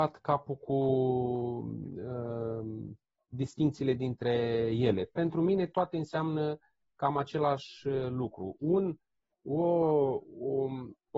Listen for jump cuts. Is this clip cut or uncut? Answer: uncut